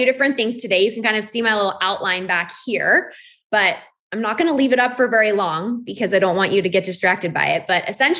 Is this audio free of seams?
yes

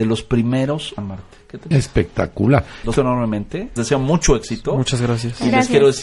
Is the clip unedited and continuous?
no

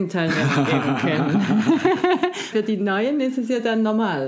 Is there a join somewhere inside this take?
yes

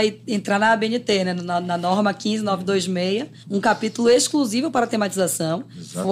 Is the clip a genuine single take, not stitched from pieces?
yes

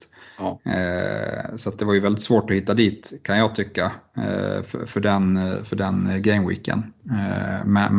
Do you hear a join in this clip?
no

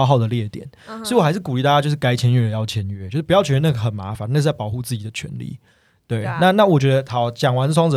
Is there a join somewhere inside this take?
no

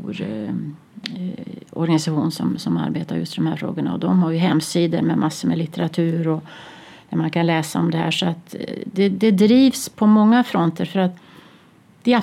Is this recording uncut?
yes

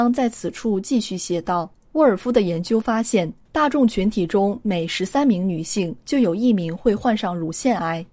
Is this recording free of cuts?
no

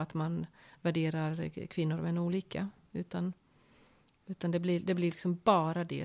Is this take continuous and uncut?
yes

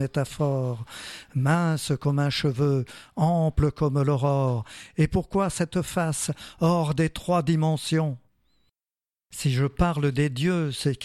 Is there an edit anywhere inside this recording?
no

